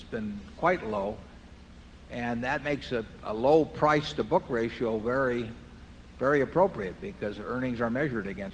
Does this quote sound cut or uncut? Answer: uncut